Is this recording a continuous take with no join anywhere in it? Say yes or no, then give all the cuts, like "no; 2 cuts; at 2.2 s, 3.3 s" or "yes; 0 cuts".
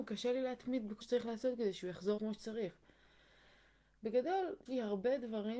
no; 3 cuts; at 1.0 s, 2.2 s, 4.7 s